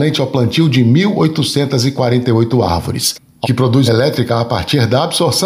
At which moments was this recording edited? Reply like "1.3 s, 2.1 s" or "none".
3.4 s, 3.9 s